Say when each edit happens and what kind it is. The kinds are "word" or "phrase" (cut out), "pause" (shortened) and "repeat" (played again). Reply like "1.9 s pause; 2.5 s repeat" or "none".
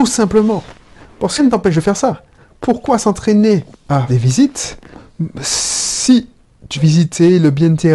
1.4 s phrase; 4.1 s word; 6.7 s word

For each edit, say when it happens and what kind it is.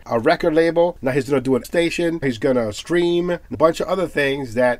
1.6 s word; 2.2 s word; 3.5 s phrase

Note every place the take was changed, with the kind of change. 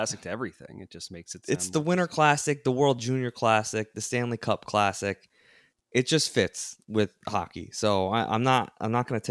none

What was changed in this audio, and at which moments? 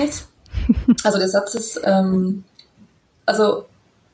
none

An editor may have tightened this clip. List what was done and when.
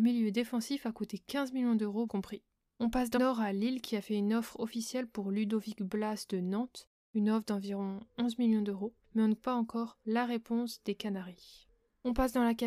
2.1 s word; 3.2 s word; 9.4 s word

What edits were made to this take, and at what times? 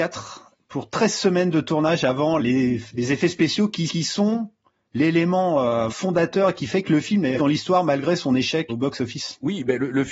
2.4 s word; 3.9 s repeat; 5.9 s word; 7.4 s word; 8.7 s word

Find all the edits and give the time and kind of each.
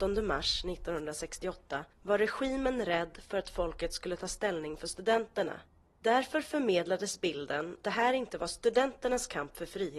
1.9 s pause; 7.8 s phrase

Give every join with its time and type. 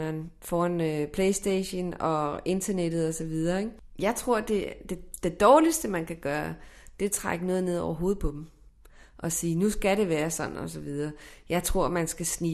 none

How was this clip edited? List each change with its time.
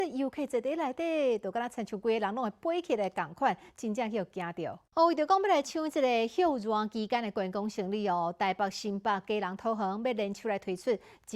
4.9 s pause

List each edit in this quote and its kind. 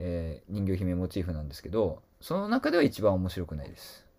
2.1 s pause

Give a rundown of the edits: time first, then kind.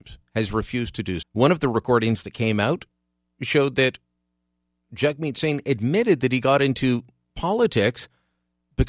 1.2 s word

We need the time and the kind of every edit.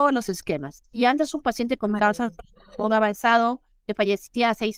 none

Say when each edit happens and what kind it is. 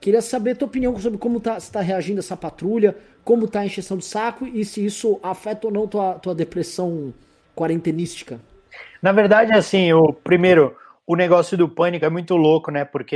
none

